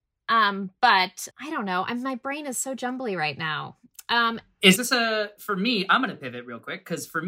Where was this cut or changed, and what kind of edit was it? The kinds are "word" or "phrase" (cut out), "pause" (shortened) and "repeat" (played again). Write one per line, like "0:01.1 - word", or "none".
0:01.3 - word
0:04.8 - phrase